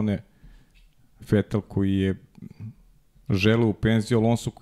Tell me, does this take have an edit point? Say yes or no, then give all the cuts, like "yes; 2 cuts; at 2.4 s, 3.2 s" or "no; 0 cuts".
no; 0 cuts